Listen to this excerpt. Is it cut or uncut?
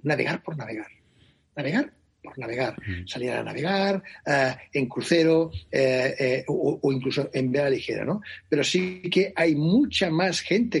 uncut